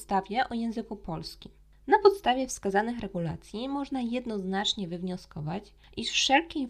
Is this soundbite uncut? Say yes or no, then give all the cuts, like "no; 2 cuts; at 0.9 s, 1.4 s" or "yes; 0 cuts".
yes; 0 cuts